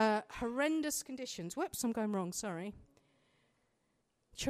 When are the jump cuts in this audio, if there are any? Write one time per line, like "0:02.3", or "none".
none